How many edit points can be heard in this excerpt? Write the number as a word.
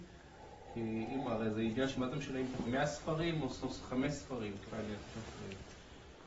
four